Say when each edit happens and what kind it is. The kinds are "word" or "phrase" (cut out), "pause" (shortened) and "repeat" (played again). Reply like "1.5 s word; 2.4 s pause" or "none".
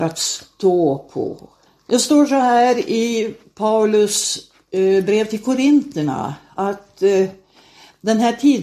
1.7 s pause